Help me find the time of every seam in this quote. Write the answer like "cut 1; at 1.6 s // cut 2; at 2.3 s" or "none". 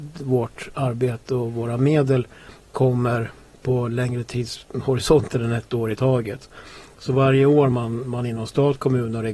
none